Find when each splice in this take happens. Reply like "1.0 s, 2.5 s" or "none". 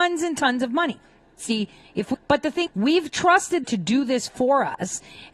2.1 s, 2.7 s, 3.6 s